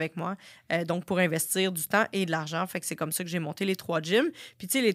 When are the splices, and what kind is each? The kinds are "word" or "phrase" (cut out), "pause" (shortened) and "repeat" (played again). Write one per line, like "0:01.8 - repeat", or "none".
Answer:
none

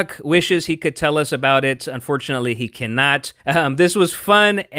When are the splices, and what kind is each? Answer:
0:03.4 - pause

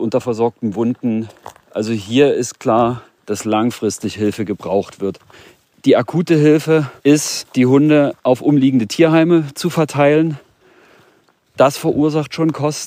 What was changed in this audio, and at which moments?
0:01.6 - pause
0:02.6 - word
0:07.0 - pause

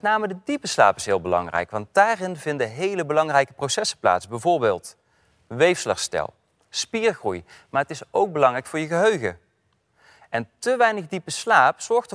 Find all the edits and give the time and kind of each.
none

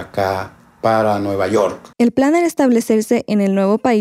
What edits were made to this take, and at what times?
0:01.9 - pause

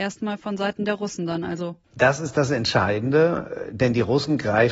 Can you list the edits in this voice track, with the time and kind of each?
0:01.8 - pause

